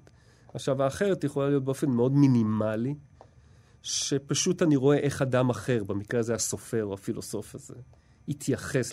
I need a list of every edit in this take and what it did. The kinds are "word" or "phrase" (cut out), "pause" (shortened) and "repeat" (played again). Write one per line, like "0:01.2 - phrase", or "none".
none